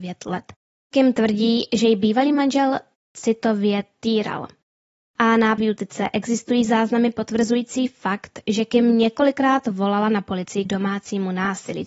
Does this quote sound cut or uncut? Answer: cut